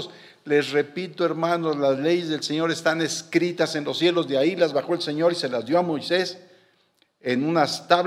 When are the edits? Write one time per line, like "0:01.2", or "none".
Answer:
none